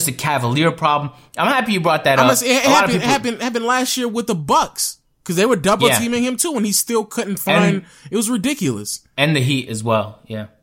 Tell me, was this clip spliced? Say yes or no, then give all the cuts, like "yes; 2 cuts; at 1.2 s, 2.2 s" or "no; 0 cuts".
no; 0 cuts